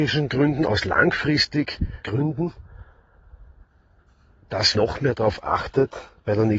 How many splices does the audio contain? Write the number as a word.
two